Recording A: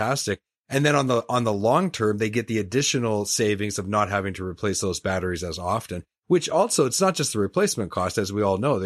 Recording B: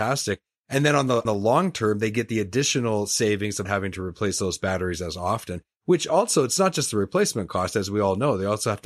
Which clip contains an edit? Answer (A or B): B